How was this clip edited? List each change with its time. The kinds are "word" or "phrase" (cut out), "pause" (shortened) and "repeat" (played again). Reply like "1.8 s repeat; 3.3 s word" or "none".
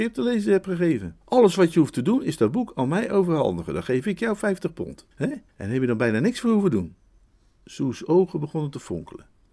1.2 s pause; 5.1 s pause; 5.5 s pause; 7.3 s pause